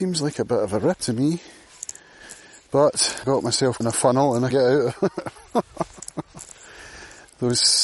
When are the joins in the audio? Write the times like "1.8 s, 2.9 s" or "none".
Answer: 1.0 s, 3.2 s, 3.8 s, 4.5 s